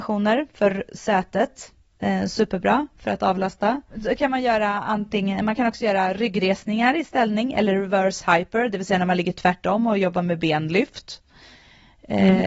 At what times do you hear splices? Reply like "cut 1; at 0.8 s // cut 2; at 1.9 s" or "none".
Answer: none